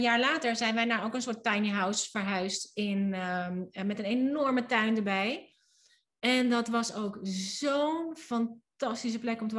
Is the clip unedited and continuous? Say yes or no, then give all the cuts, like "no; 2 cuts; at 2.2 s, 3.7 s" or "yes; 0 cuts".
yes; 0 cuts